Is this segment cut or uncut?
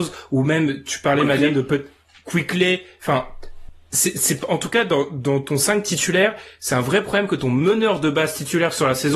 uncut